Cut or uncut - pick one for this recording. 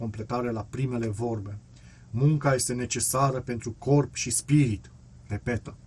uncut